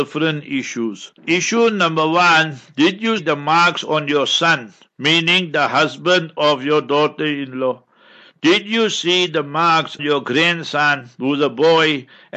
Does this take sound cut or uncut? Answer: cut